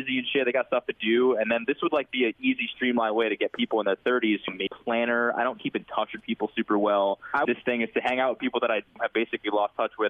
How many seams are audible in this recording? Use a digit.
2